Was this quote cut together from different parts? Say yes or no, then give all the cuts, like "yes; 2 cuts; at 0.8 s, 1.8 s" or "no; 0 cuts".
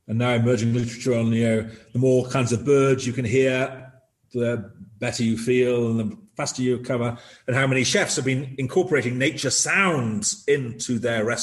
no; 0 cuts